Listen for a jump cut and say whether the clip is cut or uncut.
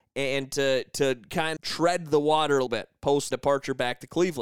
cut